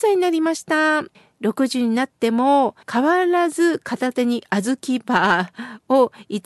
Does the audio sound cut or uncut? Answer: cut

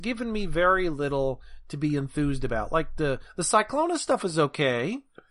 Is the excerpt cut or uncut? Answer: uncut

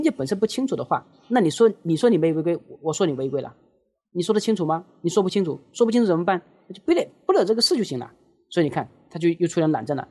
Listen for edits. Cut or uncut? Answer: uncut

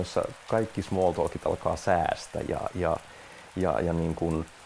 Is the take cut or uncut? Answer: uncut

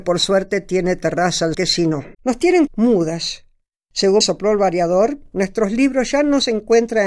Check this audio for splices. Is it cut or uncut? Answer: cut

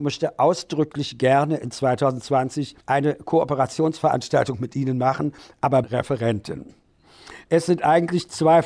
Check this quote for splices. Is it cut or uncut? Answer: cut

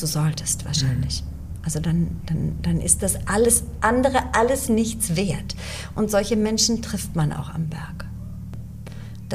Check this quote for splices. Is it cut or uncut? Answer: uncut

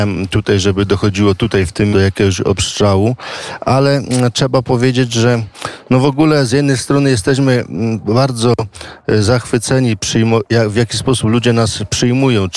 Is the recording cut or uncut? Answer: cut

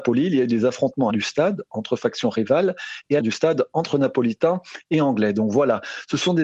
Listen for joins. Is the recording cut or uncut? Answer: cut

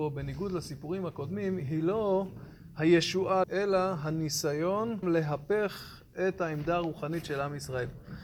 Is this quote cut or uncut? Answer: cut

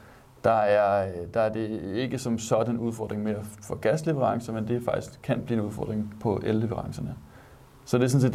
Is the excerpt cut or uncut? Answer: uncut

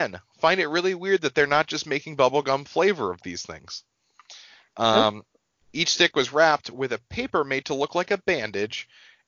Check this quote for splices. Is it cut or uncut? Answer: uncut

